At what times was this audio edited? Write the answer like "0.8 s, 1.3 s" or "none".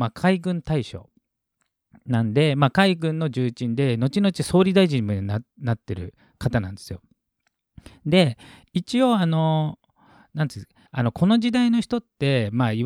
10.9 s